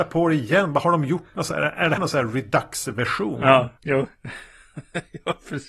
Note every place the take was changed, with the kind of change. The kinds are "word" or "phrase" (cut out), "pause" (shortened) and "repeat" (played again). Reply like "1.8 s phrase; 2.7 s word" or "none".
2.0 s word

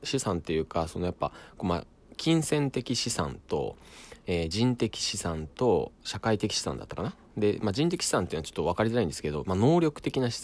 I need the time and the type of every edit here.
7.2 s pause

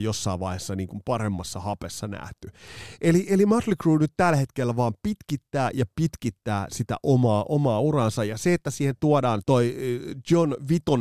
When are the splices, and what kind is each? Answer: 9.4 s word

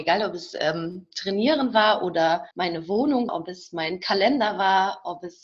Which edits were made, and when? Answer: 2.5 s pause; 3.3 s word

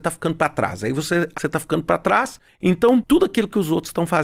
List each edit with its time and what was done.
1.3 s word

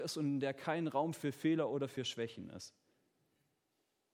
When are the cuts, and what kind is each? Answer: none

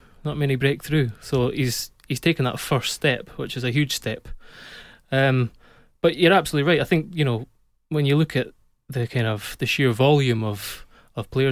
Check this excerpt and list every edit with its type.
none

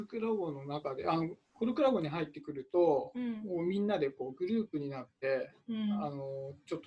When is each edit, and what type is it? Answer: 1.4 s pause

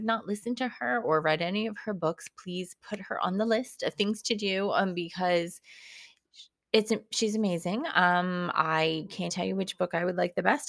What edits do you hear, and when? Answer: 9.3 s word

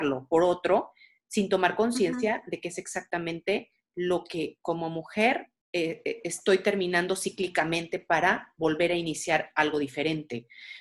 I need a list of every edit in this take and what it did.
5.6 s pause

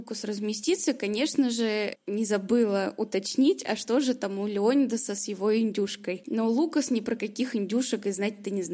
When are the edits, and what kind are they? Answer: none

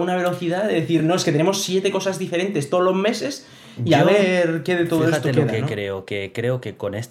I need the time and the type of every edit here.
none

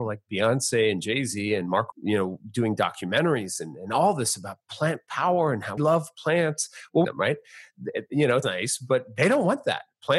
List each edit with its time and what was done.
1.9 s word; 5.8 s word; 7.0 s phrase; 8.4 s word

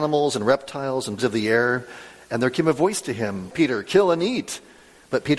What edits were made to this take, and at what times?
1.2 s word; 3.5 s word

